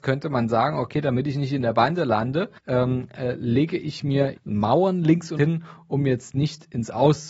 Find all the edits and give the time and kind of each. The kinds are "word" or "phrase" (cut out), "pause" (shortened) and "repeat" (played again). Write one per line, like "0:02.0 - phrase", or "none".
0:02.6 - pause
0:04.4 - word
0:05.4 - word